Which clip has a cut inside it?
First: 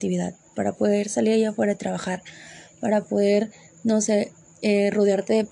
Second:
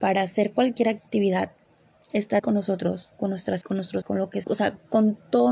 second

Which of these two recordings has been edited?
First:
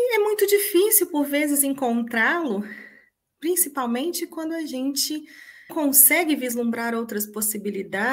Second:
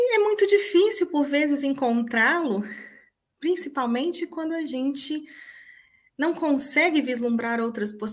first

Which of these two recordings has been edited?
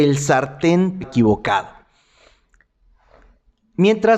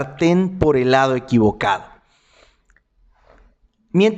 first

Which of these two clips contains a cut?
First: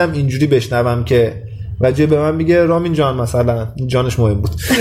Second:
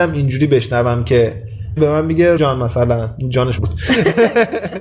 second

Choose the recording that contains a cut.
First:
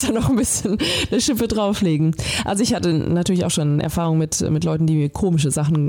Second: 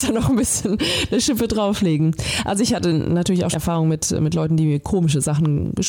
second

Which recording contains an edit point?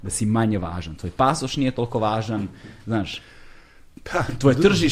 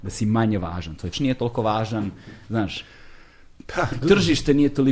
second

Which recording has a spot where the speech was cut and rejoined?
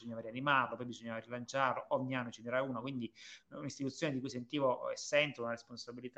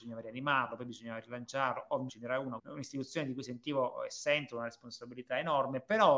second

